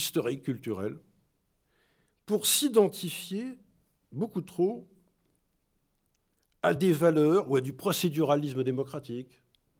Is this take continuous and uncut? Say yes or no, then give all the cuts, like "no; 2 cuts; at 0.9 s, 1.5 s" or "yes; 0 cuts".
yes; 0 cuts